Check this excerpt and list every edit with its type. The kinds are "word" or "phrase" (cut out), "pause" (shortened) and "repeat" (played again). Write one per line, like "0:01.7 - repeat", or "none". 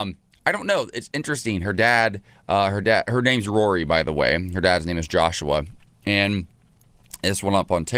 none